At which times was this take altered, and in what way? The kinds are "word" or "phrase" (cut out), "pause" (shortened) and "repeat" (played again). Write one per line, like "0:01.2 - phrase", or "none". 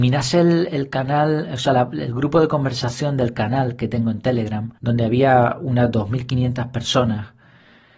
0:04.8 - pause